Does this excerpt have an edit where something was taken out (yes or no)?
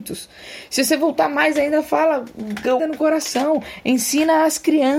yes